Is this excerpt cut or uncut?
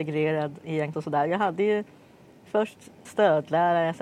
cut